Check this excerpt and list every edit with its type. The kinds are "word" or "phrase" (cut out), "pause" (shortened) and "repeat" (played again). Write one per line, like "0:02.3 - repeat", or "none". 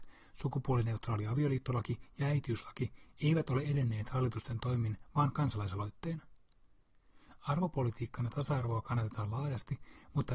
none